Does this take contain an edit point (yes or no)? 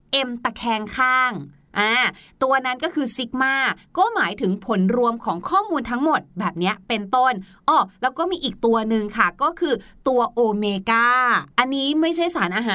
no